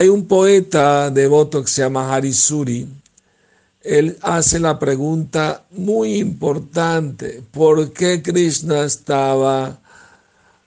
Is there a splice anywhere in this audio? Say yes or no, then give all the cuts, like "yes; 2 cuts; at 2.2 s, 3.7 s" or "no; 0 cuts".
no; 0 cuts